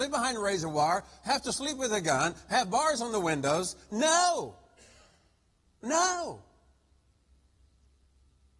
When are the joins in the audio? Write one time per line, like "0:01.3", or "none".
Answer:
none